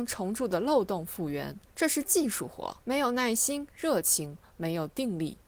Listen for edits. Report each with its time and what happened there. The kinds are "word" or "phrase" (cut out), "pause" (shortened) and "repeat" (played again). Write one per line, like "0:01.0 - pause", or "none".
0:01.7 - pause
0:02.8 - pause